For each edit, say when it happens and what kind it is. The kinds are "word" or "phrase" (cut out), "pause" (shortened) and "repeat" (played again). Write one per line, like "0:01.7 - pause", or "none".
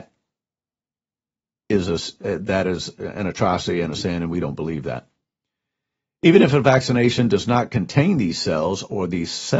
none

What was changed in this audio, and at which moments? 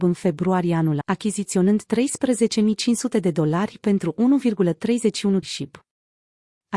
0:01.0 - word
0:05.4 - word

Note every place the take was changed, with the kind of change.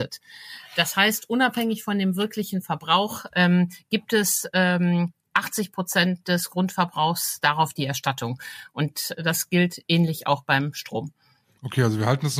none

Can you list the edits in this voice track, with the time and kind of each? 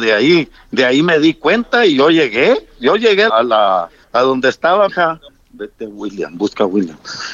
0:03.3 - word
0:04.0 - pause
0:04.9 - word
0:05.3 - pause

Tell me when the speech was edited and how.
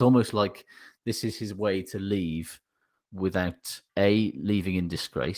0:03.9 - pause

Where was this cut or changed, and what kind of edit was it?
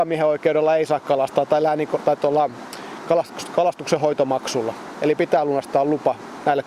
none

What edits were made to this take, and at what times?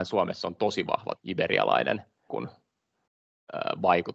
0:01.2 - word
0:02.3 - word

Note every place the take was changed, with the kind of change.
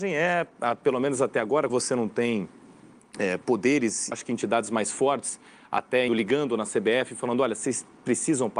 0:01.7 - word
0:04.1 - word
0:06.1 - word

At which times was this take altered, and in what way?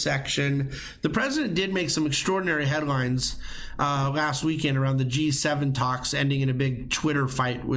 none

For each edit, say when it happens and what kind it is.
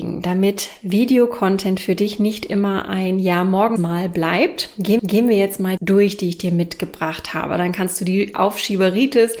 0:03.8 - phrase
0:05.0 - repeat
0:05.8 - phrase

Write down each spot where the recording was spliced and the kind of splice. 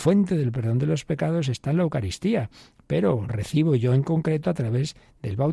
0:03.3 - word

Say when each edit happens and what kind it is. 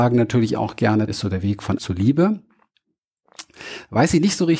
0:01.1 - word
0:01.8 - word

